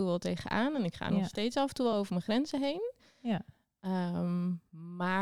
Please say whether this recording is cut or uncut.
uncut